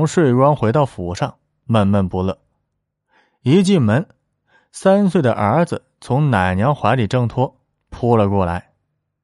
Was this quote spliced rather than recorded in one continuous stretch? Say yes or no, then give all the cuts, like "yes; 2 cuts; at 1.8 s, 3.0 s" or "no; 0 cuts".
no; 0 cuts